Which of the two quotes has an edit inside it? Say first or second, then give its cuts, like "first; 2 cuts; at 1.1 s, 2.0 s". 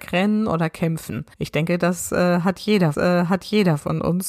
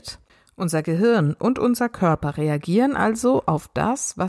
first; 2 cuts; at 1.3 s, 2.9 s